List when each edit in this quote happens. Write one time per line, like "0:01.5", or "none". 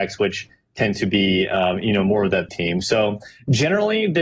0:02.5